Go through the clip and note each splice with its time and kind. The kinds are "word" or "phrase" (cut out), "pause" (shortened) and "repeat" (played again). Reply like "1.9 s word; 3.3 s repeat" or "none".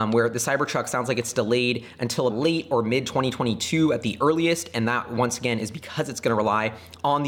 2.3 s word